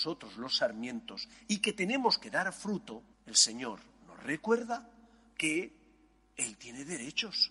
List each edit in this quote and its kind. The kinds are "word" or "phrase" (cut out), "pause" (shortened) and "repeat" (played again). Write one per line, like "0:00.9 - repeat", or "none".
0:03.1 - pause